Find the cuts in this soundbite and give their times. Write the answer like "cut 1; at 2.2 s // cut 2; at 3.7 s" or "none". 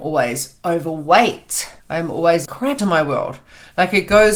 cut 1; at 1.8 s // cut 2; at 2.5 s // cut 3; at 2.8 s